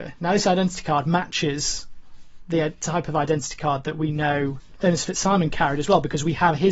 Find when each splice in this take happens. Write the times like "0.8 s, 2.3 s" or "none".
none